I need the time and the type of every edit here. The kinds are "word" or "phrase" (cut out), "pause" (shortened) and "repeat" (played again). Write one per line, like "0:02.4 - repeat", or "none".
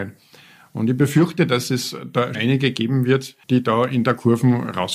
0:02.3 - word
0:03.4 - pause